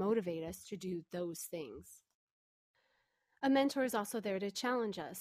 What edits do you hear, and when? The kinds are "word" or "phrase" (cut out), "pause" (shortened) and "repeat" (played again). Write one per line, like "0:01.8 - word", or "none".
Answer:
none